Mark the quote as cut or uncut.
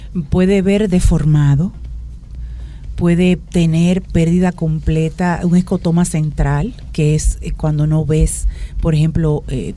uncut